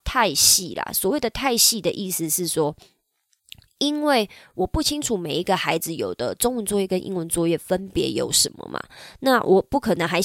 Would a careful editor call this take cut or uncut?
uncut